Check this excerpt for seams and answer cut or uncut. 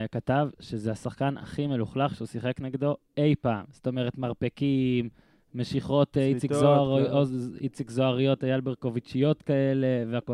uncut